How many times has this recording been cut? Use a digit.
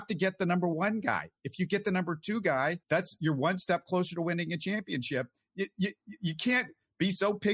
1